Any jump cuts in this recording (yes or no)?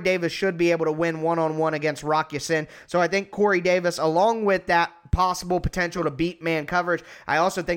no